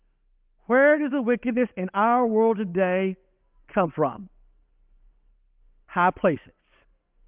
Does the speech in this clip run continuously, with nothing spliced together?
yes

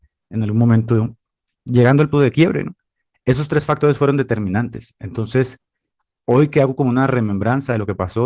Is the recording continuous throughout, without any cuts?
no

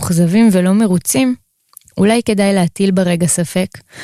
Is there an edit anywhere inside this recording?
no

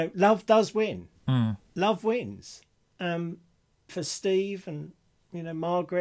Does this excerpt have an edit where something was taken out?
yes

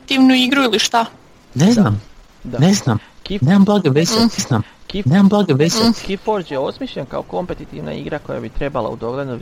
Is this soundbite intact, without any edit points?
no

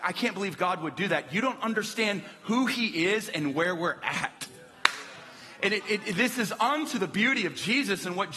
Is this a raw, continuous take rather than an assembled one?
no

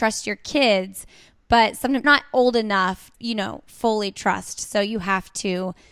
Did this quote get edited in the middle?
yes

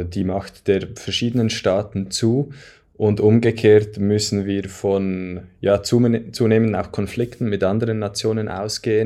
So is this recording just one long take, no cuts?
yes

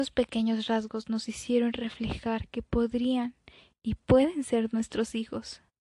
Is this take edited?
no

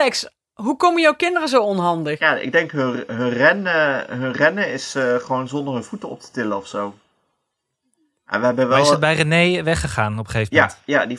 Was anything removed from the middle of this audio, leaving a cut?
no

